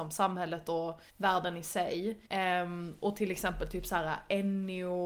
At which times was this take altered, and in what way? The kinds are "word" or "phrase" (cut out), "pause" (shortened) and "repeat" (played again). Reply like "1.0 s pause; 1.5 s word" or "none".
1.1 s pause; 2.3 s pause